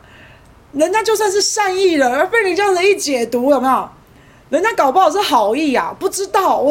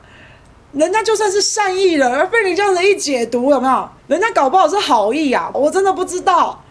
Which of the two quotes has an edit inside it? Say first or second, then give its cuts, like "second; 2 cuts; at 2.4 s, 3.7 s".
second; 2 cuts; at 4.0 s, 5.5 s